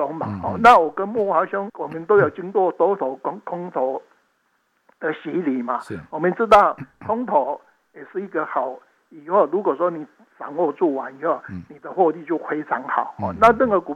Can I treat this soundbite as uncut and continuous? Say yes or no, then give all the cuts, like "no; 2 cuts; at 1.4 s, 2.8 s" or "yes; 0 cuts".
no; 1 cut; at 1.7 s